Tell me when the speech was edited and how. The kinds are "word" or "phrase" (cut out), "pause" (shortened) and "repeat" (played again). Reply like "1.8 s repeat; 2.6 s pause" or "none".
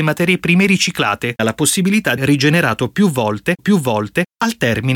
1.4 s word; 2.2 s phrase; 3.6 s repeat